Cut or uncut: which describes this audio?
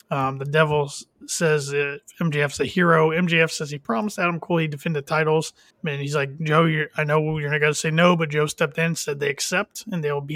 cut